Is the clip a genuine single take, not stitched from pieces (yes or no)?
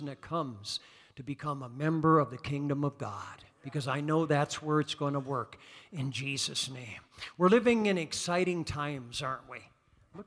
yes